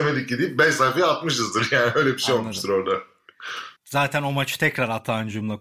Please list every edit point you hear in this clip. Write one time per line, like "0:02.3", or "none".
0:03.8